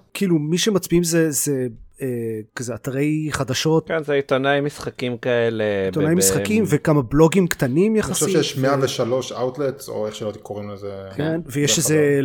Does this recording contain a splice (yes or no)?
yes